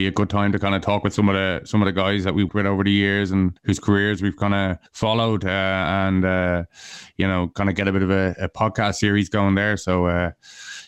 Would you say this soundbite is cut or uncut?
cut